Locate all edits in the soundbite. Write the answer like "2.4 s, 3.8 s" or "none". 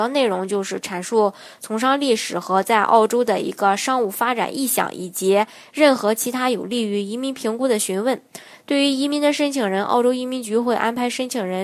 none

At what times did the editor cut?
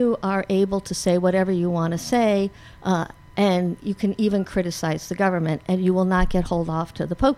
3.8 s

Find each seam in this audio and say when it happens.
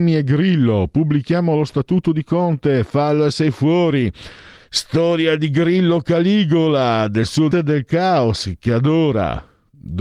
4.6 s, 7.5 s

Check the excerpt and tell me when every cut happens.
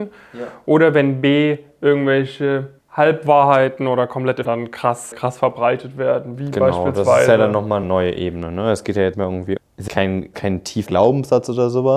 2.8 s, 4.4 s, 5.1 s, 7.8 s, 9.1 s, 9.6 s, 9.9 s, 10.3 s, 10.9 s

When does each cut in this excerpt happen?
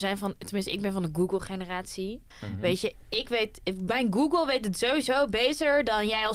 2.3 s

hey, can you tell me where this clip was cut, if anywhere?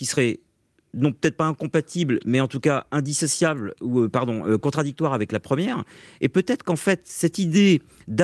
none

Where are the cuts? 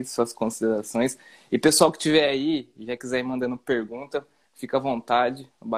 none

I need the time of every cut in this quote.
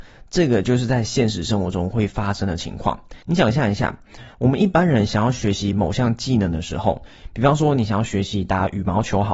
3.2 s

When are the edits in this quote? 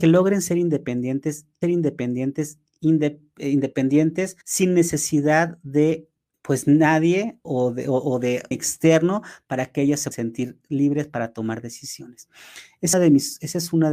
1.6 s, 4.4 s, 6.3 s, 7.4 s, 8.5 s, 10.1 s, 12.9 s

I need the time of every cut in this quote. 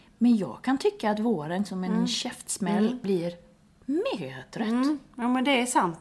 1.7 s, 3.0 s

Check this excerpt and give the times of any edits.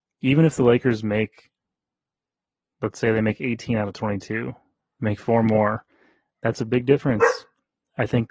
none

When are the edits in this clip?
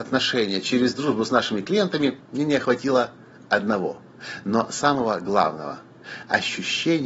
2.2 s

